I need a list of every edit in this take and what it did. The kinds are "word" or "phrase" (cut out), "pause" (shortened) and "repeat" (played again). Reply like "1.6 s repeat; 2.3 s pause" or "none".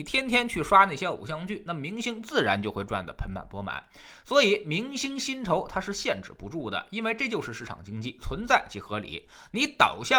none

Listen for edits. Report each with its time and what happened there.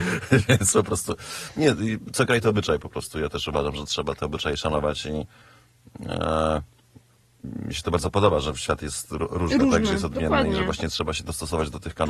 none

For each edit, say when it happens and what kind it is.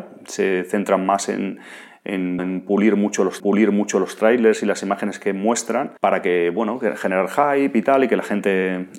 2.4 s word; 3.4 s repeat; 6.0 s pause

